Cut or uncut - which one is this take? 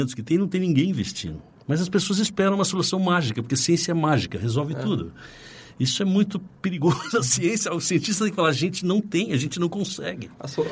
uncut